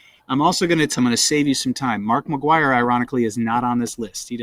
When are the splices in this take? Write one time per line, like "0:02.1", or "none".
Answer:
0:01.0

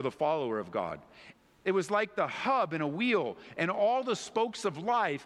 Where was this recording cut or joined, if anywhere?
none

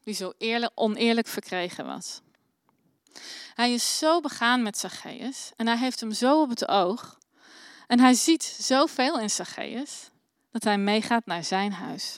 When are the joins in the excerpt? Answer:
none

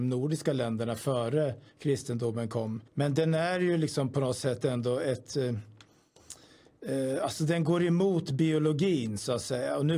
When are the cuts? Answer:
0:01.7
0:02.9

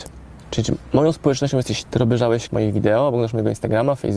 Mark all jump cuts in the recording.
0:01.8
0:02.5

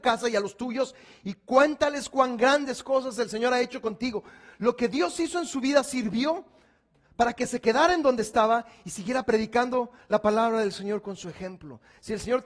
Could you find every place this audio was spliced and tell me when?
none

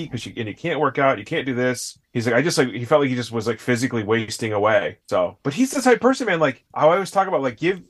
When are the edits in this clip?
0:02.0
0:05.0
0:06.7

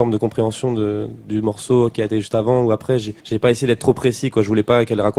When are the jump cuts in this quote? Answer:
0:03.2

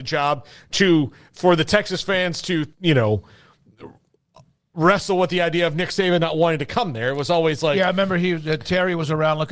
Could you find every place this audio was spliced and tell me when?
0:02.7

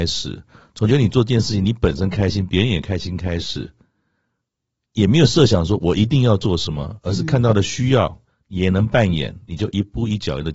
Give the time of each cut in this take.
none

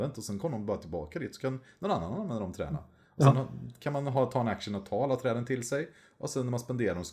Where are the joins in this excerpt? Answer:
none

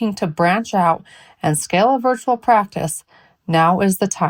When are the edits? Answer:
none

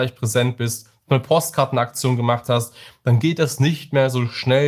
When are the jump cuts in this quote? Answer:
none

